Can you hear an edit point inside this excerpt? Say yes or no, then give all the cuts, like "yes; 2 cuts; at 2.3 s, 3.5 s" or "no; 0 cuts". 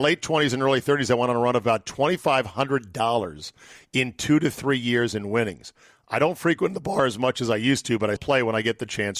yes; 1 cut; at 8.2 s